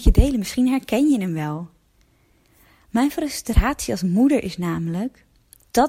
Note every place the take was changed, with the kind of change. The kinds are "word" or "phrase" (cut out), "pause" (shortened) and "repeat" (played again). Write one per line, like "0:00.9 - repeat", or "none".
none